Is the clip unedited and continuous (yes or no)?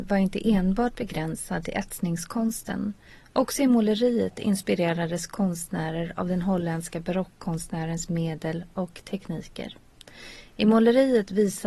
yes